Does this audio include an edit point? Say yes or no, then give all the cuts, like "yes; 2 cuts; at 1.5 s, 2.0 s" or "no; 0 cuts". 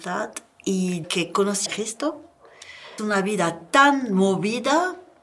yes; 3 cuts; at 1.0 s, 1.7 s, 3.0 s